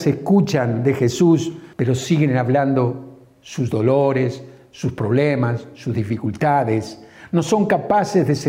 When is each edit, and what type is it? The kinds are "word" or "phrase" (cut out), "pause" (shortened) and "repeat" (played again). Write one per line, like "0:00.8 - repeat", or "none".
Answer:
0:01.7 - pause